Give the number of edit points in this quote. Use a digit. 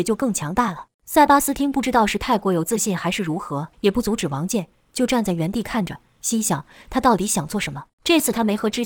3